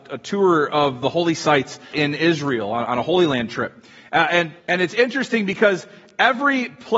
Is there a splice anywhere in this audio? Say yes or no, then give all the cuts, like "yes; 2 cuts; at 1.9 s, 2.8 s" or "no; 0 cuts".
yes; 2 cuts; at 1.9 s, 4.6 s